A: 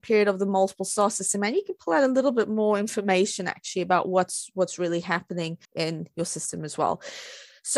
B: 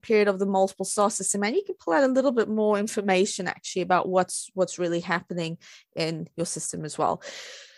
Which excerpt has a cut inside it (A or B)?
A